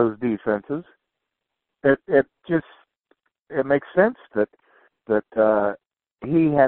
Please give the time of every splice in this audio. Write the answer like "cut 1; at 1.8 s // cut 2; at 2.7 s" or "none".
none